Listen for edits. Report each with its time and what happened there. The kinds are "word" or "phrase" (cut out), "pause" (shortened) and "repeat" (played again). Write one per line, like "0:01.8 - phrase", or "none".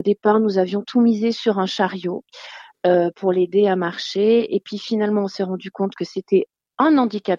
none